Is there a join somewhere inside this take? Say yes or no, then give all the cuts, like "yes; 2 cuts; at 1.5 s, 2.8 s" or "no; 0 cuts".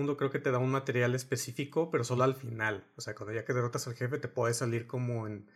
no; 0 cuts